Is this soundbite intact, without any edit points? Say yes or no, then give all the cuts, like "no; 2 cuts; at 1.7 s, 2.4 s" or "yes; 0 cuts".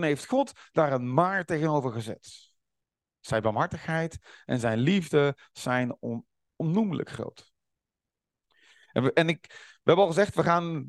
yes; 0 cuts